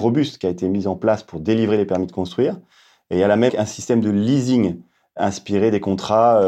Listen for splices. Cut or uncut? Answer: cut